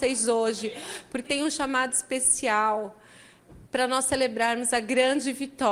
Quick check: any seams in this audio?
yes; 2 cuts; at 1.2 s, 3.7 s

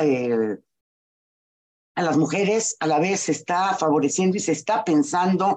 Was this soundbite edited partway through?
no; 0 cuts

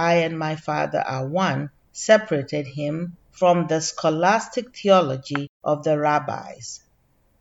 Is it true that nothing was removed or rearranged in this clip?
no; 3 cuts; at 1.8 s, 3.2 s, 5.5 s

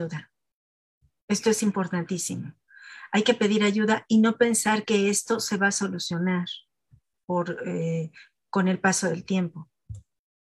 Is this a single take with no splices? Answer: yes; 0 cuts

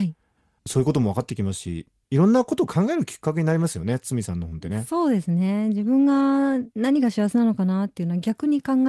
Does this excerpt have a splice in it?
yes; 1 cut; at 6.7 s

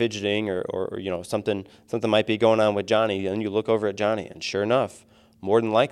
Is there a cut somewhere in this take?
no; 0 cuts

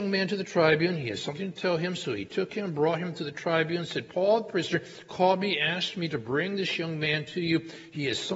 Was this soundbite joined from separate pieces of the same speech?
no; 0 cuts

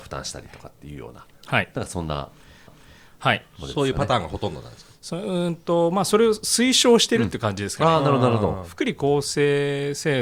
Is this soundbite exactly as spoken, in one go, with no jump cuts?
no; 1 cut; at 2.7 s

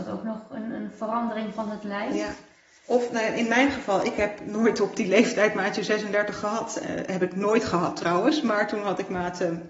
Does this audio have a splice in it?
no; 0 cuts

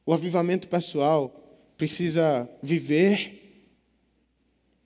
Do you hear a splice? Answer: no; 0 cuts

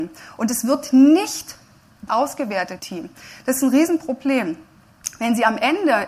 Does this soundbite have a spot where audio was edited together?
yes; 2 cuts; at 2.1 s, 2.8 s

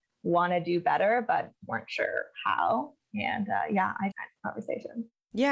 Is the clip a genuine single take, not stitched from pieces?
no; 1 cut; at 4.1 s

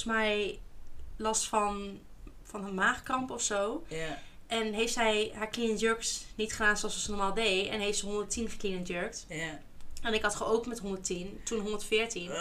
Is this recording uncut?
yes; 0 cuts

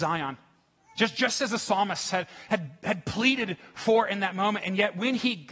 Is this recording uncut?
yes; 0 cuts

